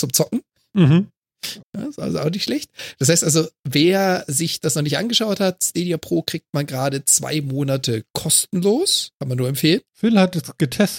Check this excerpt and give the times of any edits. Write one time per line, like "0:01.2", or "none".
0:01.6
0:09.2
0:09.9